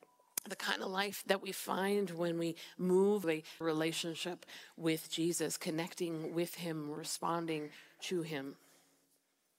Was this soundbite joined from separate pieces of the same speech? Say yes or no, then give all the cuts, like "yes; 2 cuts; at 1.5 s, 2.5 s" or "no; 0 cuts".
yes; 3 cuts; at 1.2 s, 3.2 s, 3.6 s